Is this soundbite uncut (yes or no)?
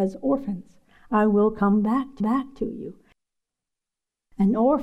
no